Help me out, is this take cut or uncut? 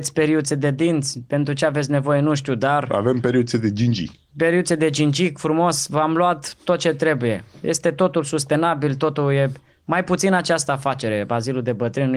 uncut